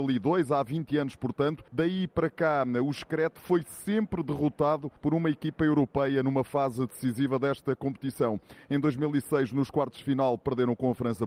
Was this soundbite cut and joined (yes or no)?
yes